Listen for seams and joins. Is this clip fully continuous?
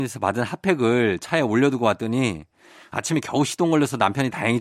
yes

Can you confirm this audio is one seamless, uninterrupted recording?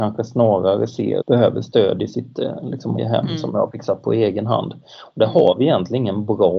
no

